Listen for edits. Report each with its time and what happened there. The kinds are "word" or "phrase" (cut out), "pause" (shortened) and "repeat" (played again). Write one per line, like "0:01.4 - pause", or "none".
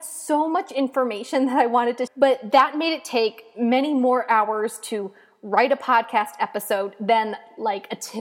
0:02.1 - word